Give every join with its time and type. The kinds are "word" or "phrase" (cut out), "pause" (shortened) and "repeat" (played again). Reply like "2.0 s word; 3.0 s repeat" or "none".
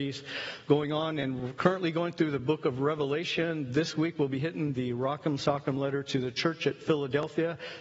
none